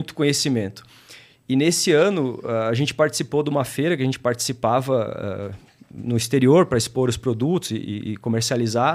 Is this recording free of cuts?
yes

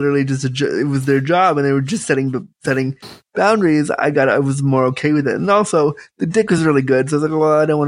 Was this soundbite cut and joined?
no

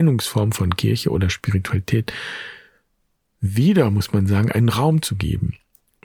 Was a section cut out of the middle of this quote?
no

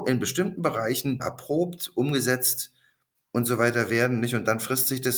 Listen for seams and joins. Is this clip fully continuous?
no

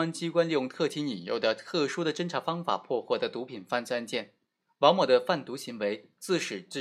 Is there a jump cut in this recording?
no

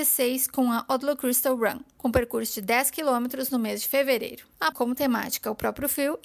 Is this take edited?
yes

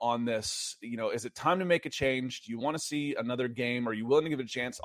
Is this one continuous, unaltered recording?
yes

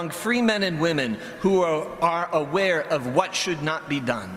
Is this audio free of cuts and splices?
yes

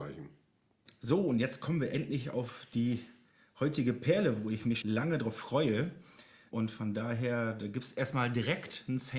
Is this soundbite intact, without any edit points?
no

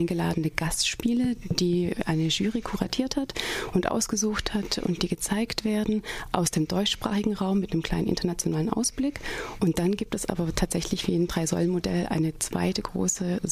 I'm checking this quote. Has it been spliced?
no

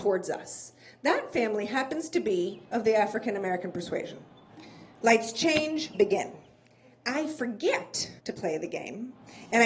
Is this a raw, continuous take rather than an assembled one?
no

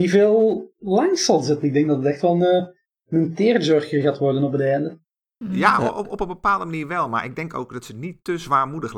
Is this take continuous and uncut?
yes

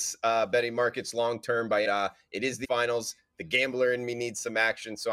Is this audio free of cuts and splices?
no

